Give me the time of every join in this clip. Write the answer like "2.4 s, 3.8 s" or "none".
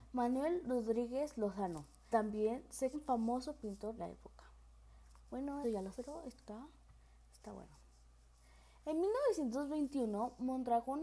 2.1 s, 2.9 s, 4.0 s, 5.6 s, 5.9 s